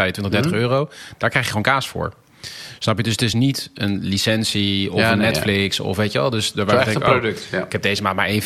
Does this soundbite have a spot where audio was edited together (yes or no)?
no